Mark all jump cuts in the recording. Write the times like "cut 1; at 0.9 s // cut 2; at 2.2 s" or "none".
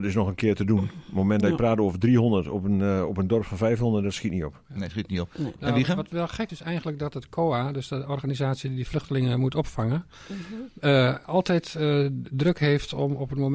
cut 1; at 6.5 s